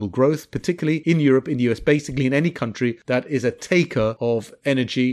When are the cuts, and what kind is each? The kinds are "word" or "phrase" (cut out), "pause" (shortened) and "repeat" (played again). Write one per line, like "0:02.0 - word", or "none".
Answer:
none